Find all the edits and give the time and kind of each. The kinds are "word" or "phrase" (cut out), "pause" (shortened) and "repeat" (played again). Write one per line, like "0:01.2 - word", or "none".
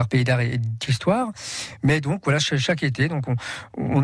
none